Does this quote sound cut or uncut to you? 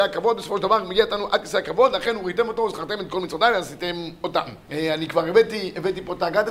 cut